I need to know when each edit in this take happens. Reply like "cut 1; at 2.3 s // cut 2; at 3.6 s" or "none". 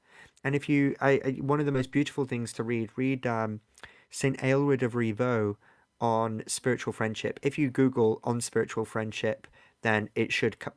none